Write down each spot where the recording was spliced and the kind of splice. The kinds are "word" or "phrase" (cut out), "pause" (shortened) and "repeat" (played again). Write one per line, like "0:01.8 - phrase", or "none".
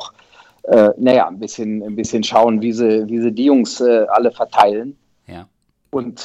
none